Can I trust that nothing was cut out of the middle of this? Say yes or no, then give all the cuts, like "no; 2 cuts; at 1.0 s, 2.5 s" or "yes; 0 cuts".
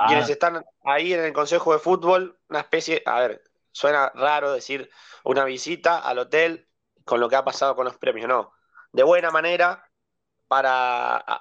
yes; 0 cuts